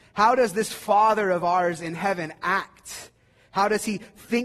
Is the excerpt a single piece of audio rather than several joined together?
yes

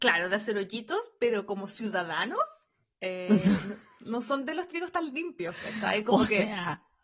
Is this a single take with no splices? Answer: yes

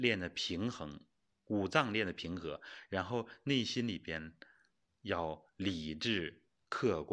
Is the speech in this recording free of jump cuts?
yes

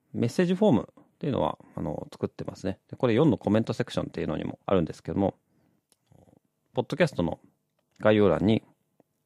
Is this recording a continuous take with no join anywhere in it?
no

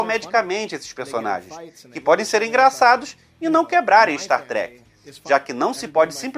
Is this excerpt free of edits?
yes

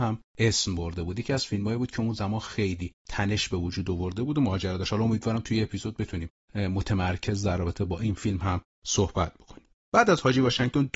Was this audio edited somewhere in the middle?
no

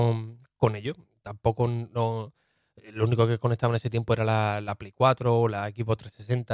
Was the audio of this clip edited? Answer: no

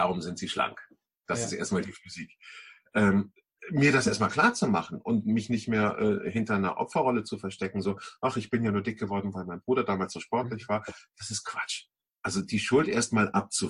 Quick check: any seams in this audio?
no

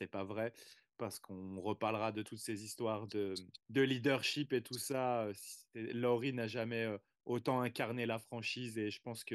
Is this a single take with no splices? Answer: no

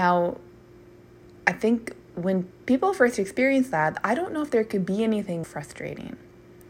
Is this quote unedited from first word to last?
no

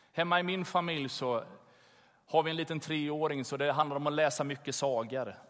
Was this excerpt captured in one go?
yes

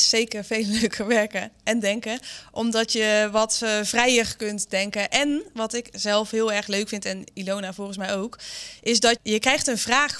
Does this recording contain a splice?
yes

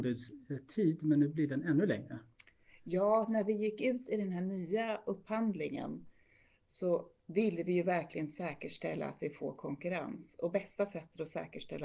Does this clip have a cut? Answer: yes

